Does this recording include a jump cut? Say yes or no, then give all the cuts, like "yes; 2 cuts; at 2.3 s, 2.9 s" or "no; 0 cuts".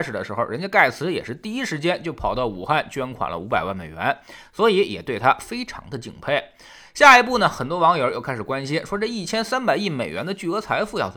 no; 0 cuts